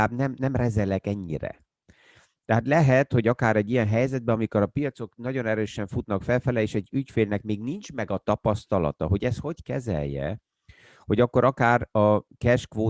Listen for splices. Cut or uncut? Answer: uncut